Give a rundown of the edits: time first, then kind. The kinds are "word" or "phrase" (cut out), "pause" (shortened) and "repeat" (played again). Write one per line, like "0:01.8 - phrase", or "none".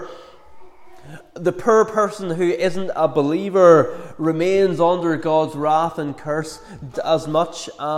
0:06.9 - word